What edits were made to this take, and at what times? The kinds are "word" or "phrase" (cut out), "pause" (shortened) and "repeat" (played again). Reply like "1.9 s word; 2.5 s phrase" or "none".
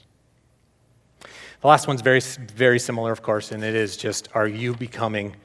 none

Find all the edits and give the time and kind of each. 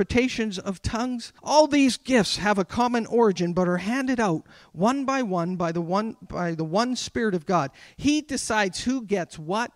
1.4 s pause

